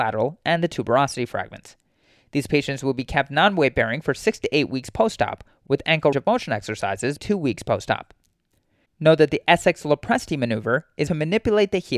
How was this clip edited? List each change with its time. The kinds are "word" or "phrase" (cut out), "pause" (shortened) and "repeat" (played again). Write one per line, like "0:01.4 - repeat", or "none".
0:06.1 - word
0:07.2 - word
0:11.1 - phrase